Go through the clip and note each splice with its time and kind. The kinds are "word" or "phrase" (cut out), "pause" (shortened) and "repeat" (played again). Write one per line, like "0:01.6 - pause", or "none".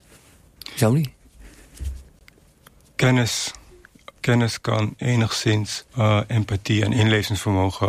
0:04.2 - pause
0:05.9 - pause